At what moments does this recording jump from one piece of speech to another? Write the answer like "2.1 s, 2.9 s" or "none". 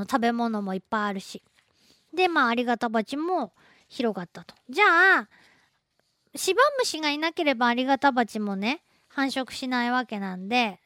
none

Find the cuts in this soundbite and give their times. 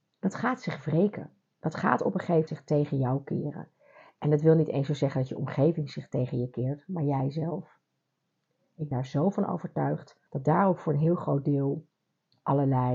1.5 s, 2.5 s, 8.9 s, 10.3 s

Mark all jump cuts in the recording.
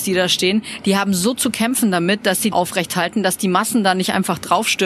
2.5 s

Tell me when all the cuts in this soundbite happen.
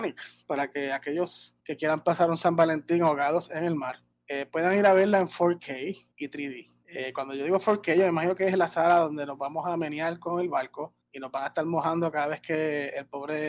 1.6 s, 4.1 s, 6.1 s, 6.8 s, 11.0 s

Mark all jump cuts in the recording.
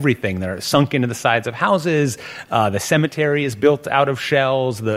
none

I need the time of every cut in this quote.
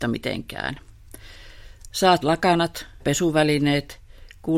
2.2 s, 3.0 s

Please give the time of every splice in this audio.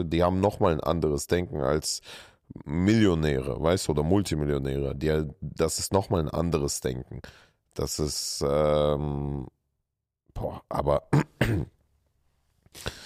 none

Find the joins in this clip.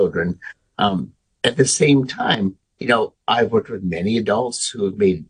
none

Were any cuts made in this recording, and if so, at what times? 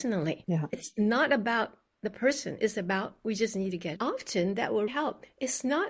4.0 s, 4.9 s

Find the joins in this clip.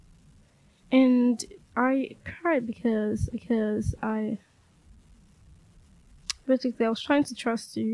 1.6 s, 3.3 s

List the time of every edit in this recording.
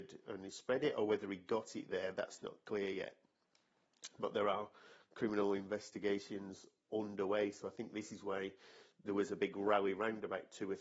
none

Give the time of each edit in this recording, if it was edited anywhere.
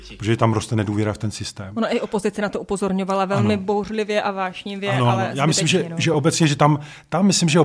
none

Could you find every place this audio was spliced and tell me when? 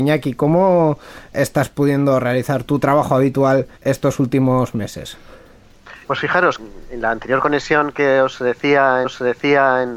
1.3 s, 2.6 s, 3.7 s, 6.0 s, 6.6 s, 9.0 s

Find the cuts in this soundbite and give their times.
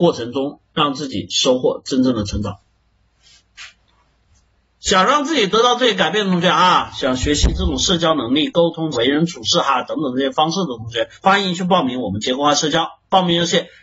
8.9 s, 11.1 s

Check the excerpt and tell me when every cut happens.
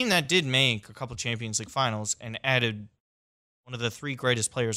none

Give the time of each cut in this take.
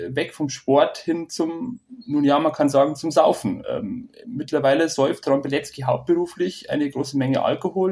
none

